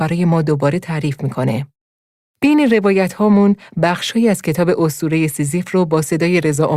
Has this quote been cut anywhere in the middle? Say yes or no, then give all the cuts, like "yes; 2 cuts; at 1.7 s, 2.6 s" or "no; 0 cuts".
no; 0 cuts